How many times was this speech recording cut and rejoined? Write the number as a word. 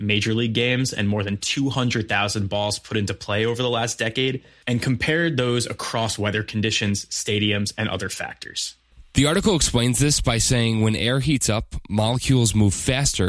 zero